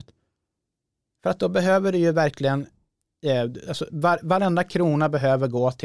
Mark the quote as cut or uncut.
cut